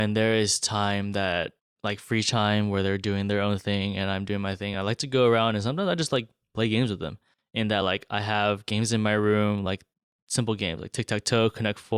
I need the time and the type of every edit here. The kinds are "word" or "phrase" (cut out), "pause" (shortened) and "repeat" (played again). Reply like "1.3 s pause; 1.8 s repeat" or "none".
none